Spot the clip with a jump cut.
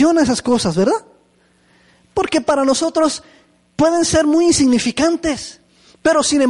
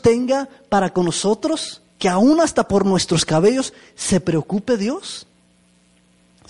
second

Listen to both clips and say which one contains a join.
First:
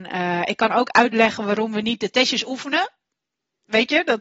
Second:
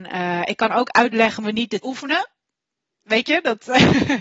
second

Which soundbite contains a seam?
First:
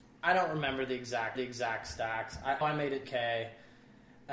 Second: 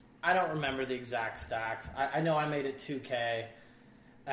first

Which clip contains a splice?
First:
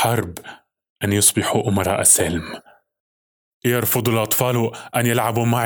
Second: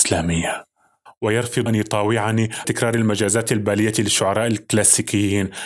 second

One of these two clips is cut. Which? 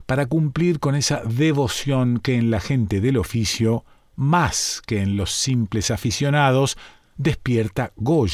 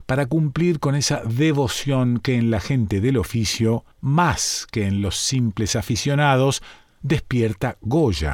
second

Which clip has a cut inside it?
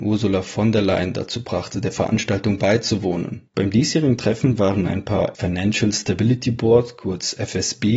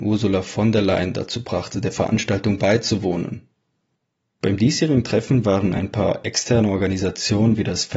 first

